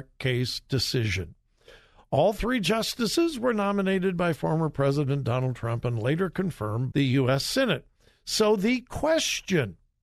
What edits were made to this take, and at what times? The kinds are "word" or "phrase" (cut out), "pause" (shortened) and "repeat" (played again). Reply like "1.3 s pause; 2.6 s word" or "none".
6.9 s word